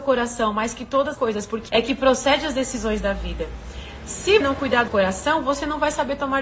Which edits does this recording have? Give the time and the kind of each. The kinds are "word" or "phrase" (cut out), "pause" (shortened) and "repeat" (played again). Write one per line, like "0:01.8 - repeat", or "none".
0:01.1 - word
0:01.7 - phrase
0:04.4 - word
0:04.9 - word